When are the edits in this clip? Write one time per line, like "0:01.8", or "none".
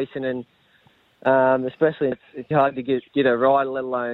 0:02.1
0:02.5
0:03.1